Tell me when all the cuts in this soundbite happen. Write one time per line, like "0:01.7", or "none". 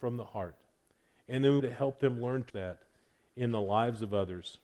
0:01.6
0:02.5